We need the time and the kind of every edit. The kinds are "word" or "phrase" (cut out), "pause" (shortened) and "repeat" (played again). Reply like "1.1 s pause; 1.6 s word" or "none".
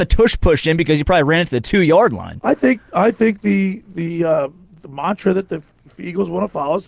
none